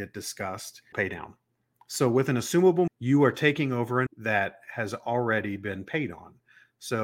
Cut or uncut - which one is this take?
cut